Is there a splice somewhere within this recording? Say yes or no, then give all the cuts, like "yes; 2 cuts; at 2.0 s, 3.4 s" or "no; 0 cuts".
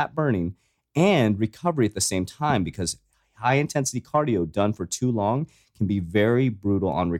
no; 0 cuts